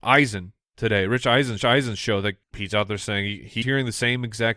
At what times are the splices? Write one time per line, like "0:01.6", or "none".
0:01.6
0:02.4
0:03.6